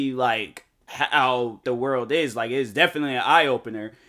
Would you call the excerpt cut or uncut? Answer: cut